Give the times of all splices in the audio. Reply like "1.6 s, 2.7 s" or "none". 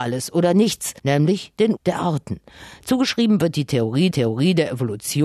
1.0 s, 1.8 s, 4.1 s